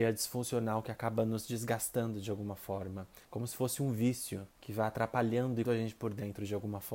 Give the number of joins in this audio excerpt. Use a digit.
3